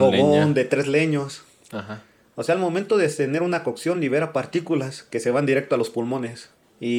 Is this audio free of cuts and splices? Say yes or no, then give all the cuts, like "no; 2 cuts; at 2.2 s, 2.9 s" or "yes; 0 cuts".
yes; 0 cuts